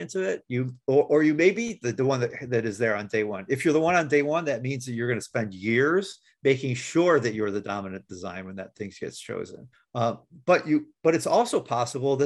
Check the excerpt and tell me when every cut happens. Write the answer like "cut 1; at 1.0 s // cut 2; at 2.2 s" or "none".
cut 1; at 9.7 s